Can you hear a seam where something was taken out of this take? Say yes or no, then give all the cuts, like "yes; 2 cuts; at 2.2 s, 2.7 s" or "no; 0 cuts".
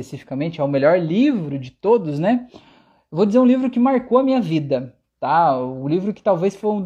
no; 0 cuts